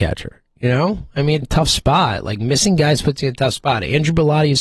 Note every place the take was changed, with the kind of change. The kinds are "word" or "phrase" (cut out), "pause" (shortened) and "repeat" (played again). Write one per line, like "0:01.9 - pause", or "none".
0:01.4 - phrase